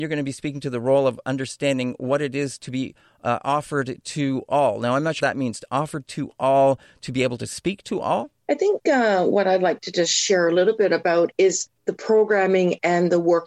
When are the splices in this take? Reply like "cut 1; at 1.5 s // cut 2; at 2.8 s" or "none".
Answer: cut 1; at 5.2 s // cut 2; at 8.4 s // cut 3; at 11.8 s